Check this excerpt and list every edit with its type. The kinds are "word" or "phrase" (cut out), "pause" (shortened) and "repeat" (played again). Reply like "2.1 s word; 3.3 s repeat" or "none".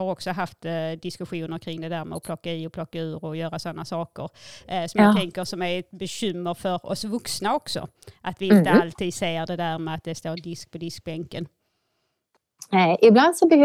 none